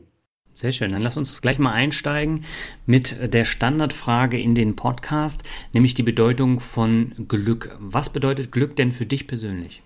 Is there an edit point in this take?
no; 0 cuts

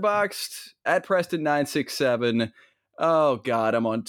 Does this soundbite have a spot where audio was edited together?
no; 0 cuts

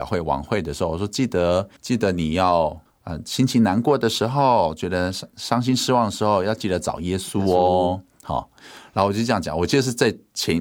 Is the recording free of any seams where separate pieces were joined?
no; 2 cuts; at 1.8 s, 2.9 s

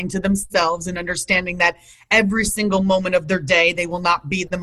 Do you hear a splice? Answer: no; 0 cuts

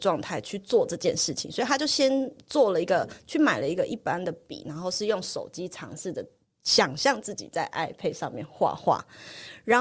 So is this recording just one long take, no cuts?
yes; 0 cuts

